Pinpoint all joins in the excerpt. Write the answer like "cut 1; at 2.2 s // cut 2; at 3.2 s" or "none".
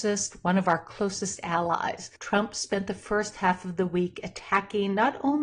cut 1; at 2.2 s